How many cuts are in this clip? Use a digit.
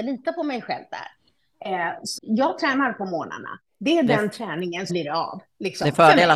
2